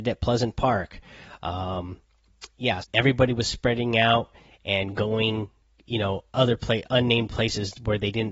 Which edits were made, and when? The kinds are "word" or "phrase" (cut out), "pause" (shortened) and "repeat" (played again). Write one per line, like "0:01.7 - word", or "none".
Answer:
0:02.8 - word